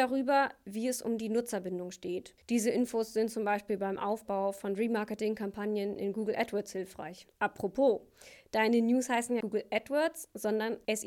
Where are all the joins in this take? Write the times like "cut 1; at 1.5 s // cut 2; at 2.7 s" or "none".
cut 1; at 2.4 s // cut 2; at 9.4 s

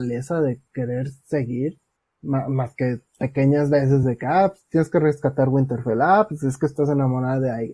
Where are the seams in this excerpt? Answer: none

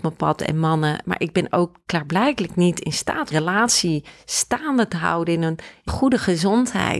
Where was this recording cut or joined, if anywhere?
cut 1; at 3.3 s // cut 2; at 5.9 s

